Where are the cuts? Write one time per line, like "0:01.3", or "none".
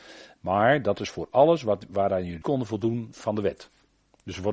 0:02.4

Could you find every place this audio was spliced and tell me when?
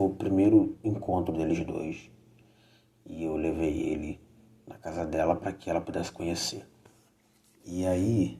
none

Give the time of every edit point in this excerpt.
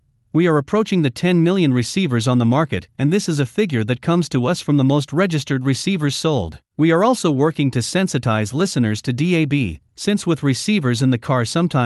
0:06.7
0:09.9

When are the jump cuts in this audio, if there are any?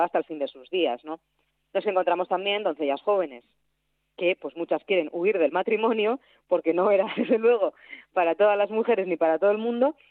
none

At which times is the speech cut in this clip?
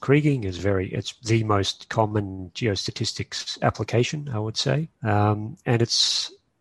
0:04.9

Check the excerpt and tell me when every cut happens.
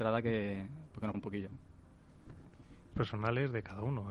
0:01.1
0:02.9

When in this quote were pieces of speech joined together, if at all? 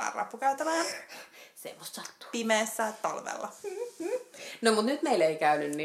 none

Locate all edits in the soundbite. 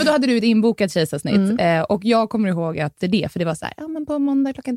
0:03.0

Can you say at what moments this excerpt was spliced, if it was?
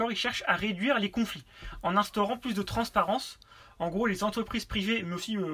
none

